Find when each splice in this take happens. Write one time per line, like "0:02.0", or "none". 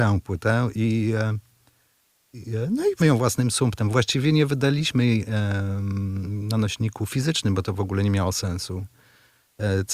0:03.0